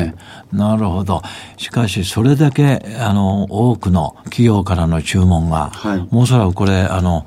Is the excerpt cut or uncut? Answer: cut